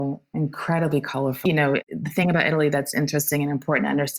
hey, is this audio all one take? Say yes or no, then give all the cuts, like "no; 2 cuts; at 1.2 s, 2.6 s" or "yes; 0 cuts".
no; 2 cuts; at 1.5 s, 2.9 s